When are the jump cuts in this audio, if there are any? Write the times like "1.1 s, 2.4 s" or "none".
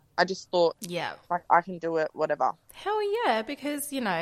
1.2 s, 2.6 s